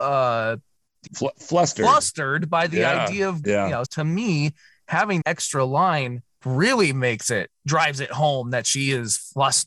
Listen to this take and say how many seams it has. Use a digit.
6